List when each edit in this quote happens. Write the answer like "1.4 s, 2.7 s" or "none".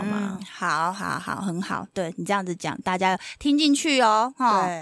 none